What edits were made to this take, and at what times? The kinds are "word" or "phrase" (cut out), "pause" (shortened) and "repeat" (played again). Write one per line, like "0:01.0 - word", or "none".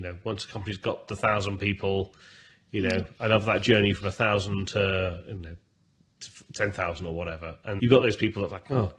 0:01.1 - word
0:07.8 - word